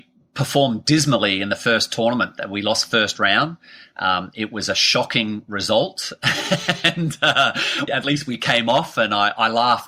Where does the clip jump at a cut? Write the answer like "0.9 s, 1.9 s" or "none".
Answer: 7.9 s